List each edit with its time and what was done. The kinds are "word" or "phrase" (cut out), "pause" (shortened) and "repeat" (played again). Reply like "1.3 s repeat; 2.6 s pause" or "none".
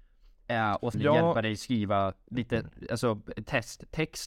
0.9 s word